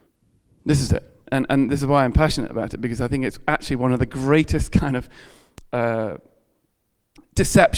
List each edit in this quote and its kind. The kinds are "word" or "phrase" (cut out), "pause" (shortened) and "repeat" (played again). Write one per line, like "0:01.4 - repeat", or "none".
none